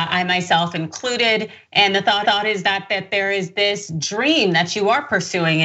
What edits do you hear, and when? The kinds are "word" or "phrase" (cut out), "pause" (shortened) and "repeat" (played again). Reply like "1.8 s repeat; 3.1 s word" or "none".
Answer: 2.2 s repeat